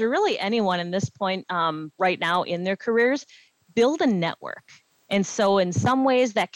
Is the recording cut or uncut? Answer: uncut